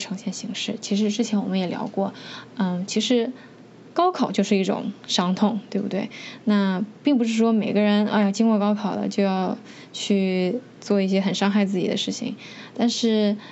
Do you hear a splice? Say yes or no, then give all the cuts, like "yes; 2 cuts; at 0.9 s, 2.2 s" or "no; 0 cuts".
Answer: no; 0 cuts